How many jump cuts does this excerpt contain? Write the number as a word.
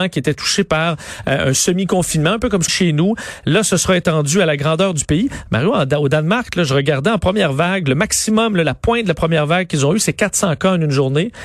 one